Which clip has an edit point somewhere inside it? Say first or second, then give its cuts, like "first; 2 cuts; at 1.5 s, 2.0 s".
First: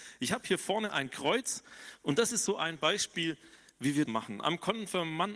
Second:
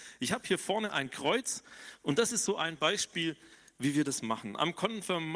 first; 1 cut; at 4.1 s